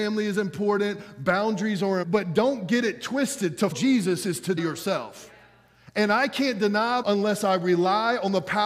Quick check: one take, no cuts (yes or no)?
no